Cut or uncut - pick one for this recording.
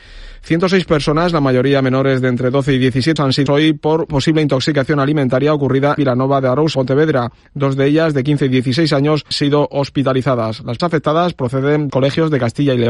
cut